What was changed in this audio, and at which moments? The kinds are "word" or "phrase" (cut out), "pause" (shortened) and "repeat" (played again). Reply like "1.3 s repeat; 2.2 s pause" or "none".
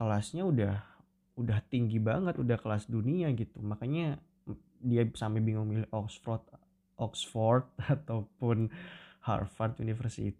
none